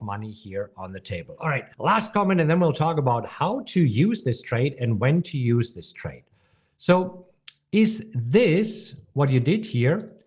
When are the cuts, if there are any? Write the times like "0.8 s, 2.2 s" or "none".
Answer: none